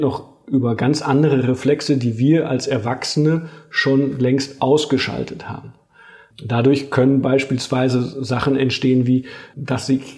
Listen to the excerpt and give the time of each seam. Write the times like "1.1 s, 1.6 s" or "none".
none